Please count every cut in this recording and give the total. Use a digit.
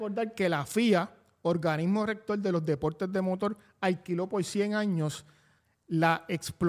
0